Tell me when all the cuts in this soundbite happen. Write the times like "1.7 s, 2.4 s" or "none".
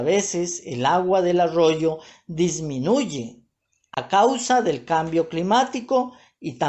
none